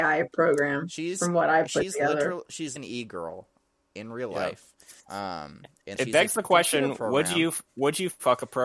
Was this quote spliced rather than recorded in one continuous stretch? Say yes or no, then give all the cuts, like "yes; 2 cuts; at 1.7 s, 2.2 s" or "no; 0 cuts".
yes; 4 cuts; at 2.8 s, 5.0 s, 6.0 s, 7.7 s